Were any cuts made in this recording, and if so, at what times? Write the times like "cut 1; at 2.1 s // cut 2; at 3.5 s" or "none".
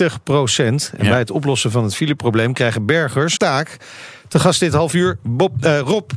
cut 1; at 3.4 s